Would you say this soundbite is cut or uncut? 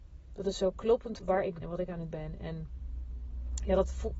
cut